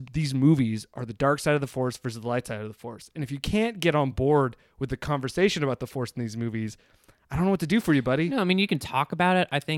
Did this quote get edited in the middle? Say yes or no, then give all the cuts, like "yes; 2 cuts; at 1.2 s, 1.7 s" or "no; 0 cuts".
no; 0 cuts